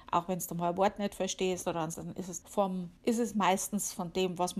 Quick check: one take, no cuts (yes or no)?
no